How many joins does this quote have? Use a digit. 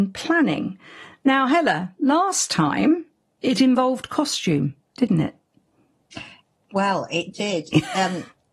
0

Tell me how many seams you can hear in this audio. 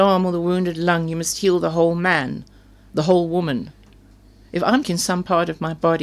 1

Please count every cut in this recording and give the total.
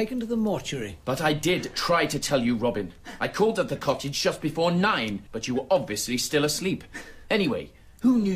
1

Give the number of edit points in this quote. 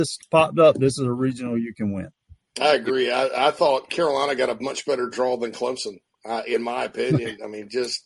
1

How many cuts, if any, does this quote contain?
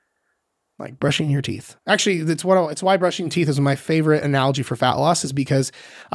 1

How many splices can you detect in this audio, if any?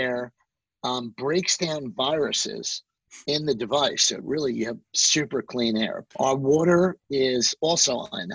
1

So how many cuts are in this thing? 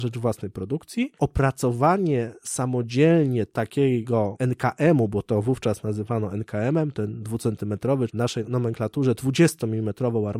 1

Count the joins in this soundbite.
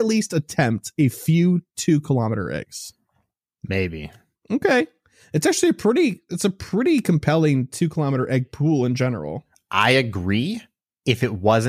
0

